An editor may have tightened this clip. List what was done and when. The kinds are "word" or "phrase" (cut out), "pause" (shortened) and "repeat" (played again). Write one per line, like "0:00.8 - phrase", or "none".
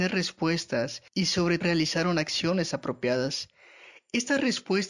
0:01.6 - word